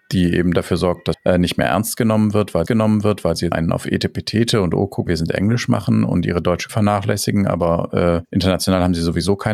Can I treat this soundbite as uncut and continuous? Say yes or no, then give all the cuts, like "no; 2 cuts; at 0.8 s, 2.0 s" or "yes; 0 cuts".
no; 6 cuts; at 1.1 s, 2.7 s, 3.5 s, 5.1 s, 6.7 s, 8.2 s